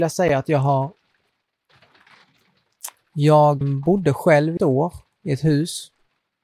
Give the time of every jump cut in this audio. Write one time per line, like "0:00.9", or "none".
0:03.6
0:04.6